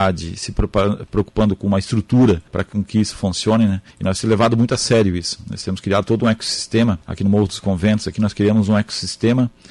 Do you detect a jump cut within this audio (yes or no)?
yes